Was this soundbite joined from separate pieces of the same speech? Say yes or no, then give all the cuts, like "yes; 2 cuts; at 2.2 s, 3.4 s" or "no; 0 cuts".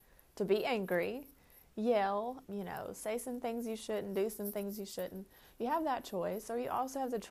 yes; 1 cut; at 2.4 s